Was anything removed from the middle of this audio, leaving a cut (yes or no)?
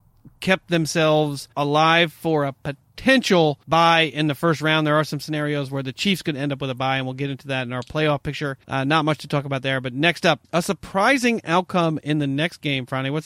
yes